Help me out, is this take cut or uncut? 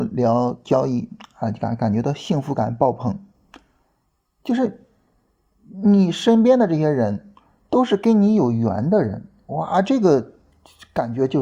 uncut